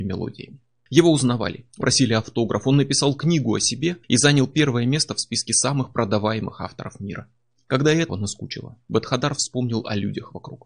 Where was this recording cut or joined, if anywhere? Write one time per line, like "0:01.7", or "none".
0:01.8
0:04.0
0:08.1